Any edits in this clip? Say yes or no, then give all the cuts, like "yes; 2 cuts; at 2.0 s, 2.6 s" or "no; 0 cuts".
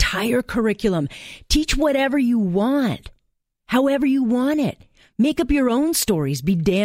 no; 0 cuts